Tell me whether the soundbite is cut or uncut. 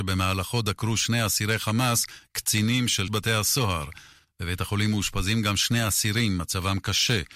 cut